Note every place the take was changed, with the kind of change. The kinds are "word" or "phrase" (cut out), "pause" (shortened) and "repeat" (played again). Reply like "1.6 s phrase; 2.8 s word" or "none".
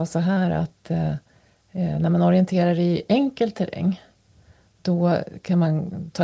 none